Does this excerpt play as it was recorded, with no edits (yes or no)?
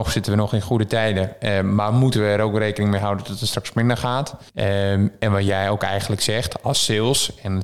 no